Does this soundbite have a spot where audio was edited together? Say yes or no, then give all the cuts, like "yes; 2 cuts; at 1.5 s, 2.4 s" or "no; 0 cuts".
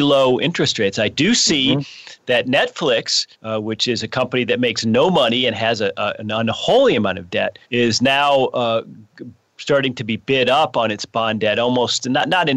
yes; 2 cuts; at 3.3 s, 7.6 s